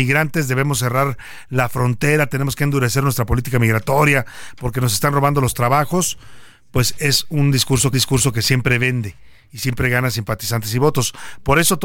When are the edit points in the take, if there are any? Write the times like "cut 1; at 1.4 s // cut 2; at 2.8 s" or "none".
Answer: cut 1; at 7.9 s